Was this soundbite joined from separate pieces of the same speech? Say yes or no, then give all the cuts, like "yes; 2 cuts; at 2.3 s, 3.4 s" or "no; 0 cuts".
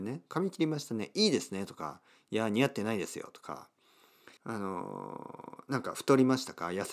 yes; 1 cut; at 4.4 s